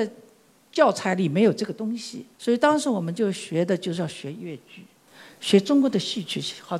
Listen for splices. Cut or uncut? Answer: cut